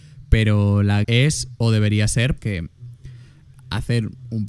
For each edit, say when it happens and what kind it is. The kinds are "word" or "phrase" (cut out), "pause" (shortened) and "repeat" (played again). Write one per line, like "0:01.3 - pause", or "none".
0:01.0 - word
0:02.4 - word